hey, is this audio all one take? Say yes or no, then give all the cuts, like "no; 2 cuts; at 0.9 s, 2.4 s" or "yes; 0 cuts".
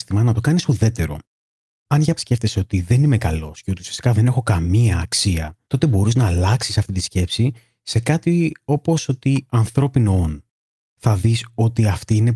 no; 3 cuts; at 2.2 s, 5.6 s, 9.5 s